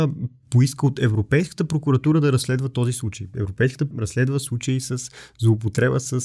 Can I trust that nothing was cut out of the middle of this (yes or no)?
no